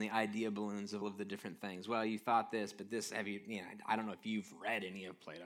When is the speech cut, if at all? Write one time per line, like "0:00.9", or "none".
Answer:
0:01.0
0:03.1